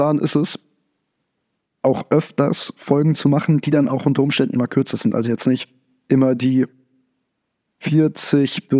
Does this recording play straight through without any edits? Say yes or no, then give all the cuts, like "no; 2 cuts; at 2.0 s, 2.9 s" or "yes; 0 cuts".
yes; 0 cuts